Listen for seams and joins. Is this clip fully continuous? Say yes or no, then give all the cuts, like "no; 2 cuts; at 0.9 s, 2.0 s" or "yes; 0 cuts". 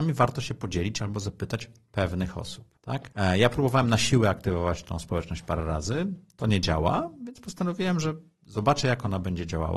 yes; 0 cuts